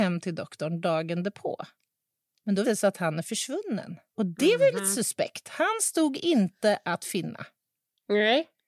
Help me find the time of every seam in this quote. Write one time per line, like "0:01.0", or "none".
0:02.6
0:04.1